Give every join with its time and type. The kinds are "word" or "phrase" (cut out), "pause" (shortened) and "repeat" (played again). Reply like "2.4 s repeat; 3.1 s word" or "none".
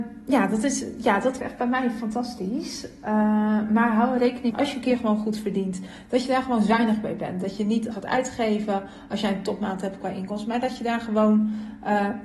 1.4 s word; 4.5 s phrase; 7.9 s phrase